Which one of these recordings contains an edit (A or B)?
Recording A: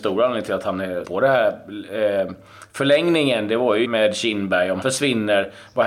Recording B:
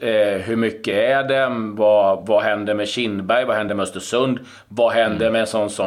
A